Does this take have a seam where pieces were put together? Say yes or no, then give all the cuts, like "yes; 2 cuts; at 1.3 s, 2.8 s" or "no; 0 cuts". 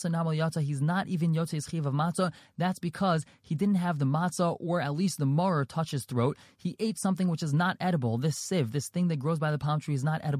no; 0 cuts